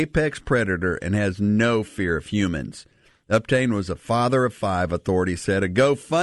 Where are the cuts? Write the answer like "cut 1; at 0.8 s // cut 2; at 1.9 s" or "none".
none